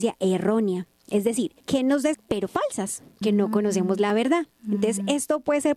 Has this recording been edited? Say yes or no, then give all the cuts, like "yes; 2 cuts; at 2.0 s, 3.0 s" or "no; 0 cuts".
yes; 3 cuts; at 1.6 s, 2.1 s, 3.2 s